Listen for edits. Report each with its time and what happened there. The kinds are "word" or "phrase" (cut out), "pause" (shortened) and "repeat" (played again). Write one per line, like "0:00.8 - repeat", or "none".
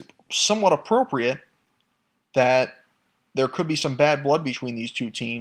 none